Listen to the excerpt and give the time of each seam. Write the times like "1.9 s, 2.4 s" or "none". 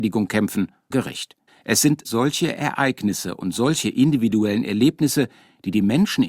0.9 s, 1.5 s